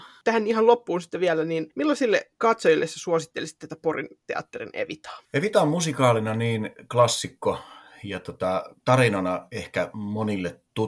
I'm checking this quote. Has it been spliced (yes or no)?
yes